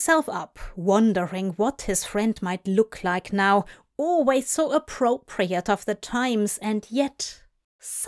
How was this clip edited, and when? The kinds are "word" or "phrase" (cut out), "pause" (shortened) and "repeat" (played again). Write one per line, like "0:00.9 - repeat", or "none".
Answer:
none